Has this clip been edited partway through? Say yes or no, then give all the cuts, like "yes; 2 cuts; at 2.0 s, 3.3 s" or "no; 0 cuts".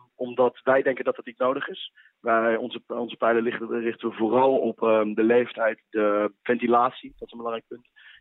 yes; 1 cut; at 6.4 s